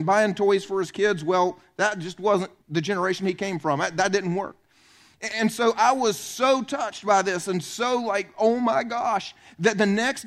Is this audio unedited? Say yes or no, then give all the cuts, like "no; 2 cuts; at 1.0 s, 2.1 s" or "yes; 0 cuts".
no; 1 cut; at 2.6 s